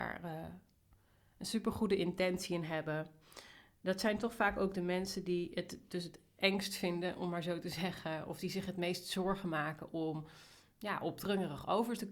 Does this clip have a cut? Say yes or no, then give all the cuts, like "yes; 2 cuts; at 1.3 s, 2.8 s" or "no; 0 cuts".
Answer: no; 0 cuts